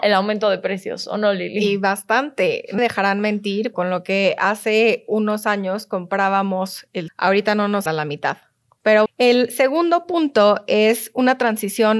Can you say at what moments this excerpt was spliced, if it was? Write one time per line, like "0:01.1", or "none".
0:02.8
0:03.7
0:07.1
0:07.9
0:09.1